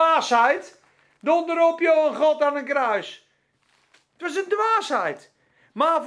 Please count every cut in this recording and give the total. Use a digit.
0